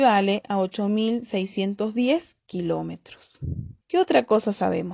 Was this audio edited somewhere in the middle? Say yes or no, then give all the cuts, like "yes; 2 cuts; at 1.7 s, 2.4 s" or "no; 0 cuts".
yes; 1 cut; at 3.8 s